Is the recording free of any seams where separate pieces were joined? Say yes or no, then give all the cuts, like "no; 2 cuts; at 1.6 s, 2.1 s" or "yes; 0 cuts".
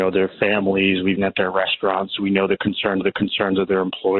no; 2 cuts; at 1.2 s, 3.0 s